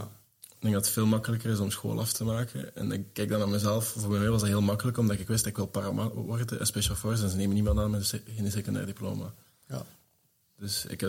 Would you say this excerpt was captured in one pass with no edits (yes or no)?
yes